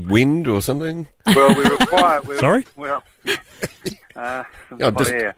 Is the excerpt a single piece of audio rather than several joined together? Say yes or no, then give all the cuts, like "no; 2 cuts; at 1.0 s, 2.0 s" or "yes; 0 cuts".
yes; 0 cuts